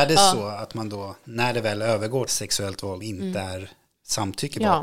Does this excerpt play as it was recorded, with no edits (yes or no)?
no